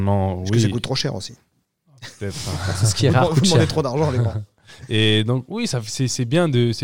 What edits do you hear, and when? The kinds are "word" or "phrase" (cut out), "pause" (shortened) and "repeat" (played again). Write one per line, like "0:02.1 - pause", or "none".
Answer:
none